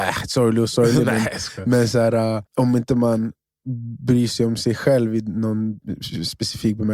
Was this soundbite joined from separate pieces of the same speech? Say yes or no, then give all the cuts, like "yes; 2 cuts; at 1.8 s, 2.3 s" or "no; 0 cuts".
yes; 1 cut; at 2.5 s